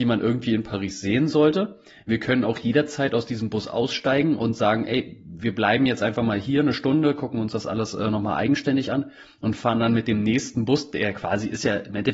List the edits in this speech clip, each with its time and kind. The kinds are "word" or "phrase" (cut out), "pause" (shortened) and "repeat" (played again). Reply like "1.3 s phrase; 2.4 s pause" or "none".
none